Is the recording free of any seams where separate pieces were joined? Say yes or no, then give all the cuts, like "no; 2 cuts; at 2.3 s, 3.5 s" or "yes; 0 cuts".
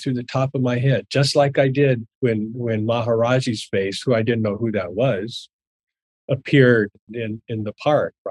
no; 2 cuts; at 2.1 s, 7.1 s